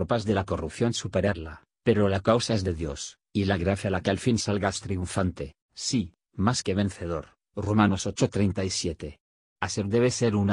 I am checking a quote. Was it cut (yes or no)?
no